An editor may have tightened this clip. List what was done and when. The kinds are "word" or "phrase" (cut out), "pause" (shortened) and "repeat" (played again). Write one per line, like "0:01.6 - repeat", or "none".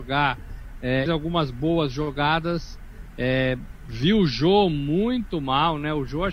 0:01.1 - phrase